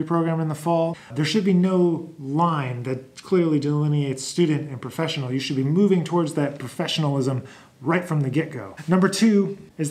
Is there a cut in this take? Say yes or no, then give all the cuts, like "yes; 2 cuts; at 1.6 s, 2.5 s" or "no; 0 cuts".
yes; 1 cut; at 1.1 s